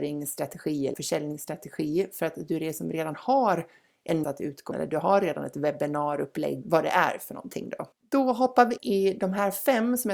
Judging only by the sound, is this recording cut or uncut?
cut